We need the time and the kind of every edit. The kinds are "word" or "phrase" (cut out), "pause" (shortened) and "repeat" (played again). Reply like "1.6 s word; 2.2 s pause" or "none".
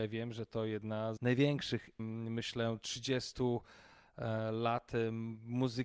1.2 s word; 2.0 s phrase